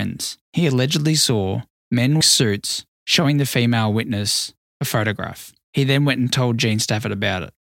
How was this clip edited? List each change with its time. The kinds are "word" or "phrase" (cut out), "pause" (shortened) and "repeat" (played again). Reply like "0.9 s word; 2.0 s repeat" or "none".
2.2 s word